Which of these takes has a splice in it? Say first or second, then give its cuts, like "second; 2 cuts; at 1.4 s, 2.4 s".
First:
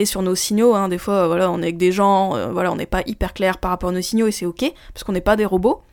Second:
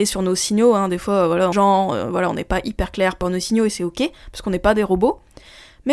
second; 2 cuts; at 1.5 s, 3.2 s